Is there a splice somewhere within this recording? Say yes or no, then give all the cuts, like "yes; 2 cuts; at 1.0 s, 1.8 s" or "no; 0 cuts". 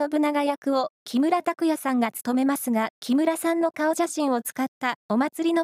yes; 2 cuts; at 0.9 s, 3.0 s